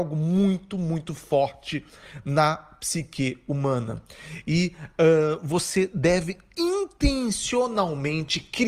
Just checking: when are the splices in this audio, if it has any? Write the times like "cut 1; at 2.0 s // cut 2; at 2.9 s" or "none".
none